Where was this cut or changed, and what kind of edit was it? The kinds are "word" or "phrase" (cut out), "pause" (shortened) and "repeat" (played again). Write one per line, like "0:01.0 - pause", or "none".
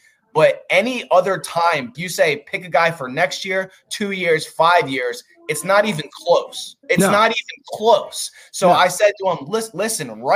0:01.9 - phrase
0:06.8 - pause